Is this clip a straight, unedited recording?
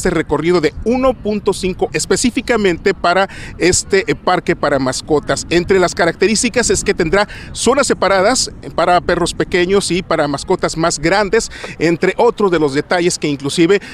no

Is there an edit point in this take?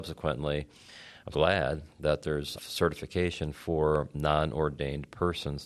yes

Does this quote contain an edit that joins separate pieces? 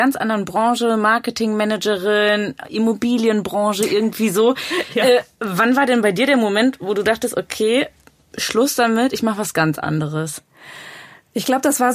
no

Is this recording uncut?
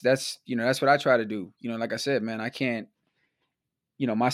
yes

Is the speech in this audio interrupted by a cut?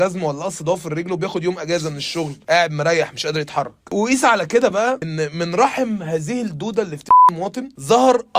no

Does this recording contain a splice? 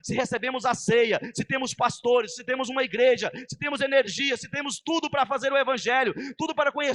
no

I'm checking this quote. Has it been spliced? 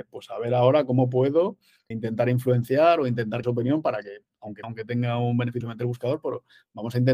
yes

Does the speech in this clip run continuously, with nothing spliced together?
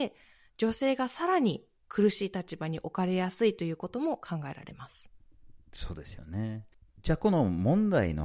no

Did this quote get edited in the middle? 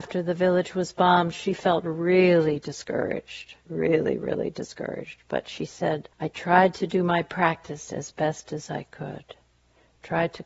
yes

